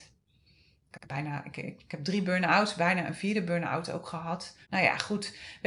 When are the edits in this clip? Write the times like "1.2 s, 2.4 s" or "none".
4.6 s